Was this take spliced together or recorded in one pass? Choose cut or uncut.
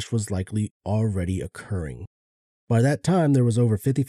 uncut